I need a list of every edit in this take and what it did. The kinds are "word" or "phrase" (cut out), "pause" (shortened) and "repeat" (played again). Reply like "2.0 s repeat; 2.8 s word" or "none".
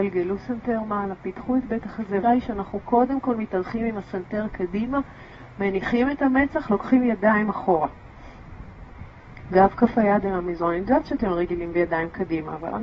2.2 s word